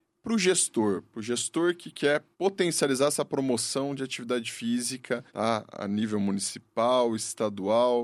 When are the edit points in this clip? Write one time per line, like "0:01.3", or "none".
0:02.3
0:05.3